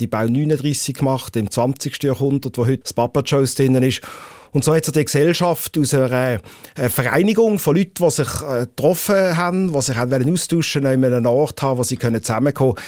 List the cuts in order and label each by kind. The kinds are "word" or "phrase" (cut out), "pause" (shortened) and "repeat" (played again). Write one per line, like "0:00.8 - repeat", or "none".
0:02.8 - word